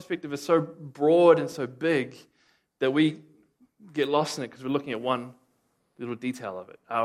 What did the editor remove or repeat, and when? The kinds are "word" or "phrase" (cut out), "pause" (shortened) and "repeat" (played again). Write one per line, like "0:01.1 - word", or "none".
none